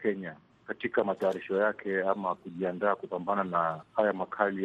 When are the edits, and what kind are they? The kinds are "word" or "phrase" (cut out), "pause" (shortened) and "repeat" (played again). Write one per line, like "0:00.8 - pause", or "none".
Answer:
none